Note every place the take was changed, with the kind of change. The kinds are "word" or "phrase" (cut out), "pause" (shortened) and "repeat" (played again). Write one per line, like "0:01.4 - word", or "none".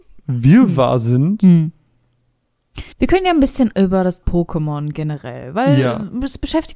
0:02.9 - pause
0:03.7 - word
0:04.2 - word